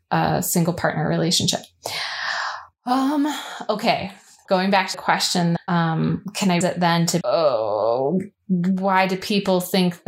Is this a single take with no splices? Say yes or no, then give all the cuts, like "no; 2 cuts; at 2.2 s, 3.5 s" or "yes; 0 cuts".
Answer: no; 5 cuts; at 4.4 s, 4.9 s, 5.6 s, 6.6 s, 7.2 s